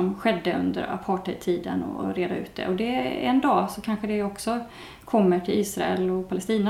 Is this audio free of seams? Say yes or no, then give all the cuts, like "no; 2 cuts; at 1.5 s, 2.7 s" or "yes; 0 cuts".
yes; 0 cuts